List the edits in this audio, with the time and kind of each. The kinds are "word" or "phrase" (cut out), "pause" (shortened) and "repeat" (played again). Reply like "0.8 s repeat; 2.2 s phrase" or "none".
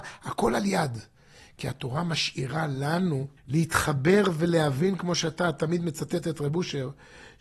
3.4 s pause